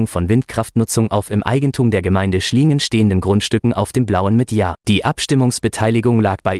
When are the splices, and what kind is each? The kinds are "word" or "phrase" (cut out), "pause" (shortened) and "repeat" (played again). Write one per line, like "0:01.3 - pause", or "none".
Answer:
0:04.8 - pause